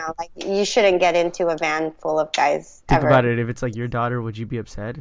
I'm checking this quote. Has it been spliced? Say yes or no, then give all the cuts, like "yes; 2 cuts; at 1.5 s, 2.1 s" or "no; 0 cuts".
no; 0 cuts